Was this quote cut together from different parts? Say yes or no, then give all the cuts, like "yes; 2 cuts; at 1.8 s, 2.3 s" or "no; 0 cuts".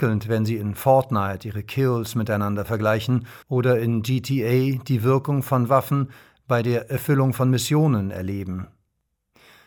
yes; 1 cut; at 3.4 s